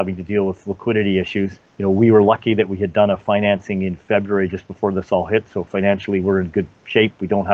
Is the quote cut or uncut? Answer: cut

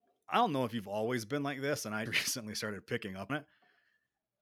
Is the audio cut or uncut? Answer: cut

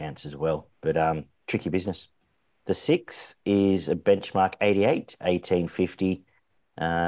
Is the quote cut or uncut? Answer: cut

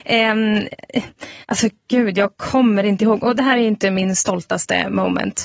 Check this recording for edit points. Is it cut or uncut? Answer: cut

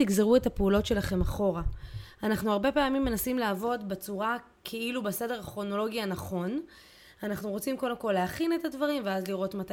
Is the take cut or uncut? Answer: uncut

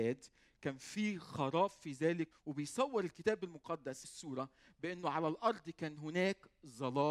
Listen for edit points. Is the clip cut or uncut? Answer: cut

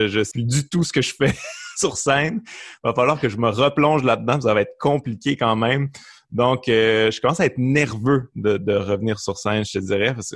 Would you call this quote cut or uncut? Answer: uncut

